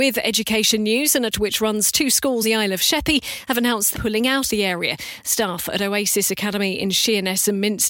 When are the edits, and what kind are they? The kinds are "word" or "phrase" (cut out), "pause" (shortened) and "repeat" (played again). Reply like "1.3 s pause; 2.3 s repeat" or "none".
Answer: 1.3 s word; 2.4 s word; 3.9 s word; 4.5 s word